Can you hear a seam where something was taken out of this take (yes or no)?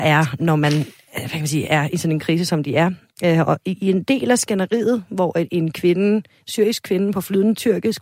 no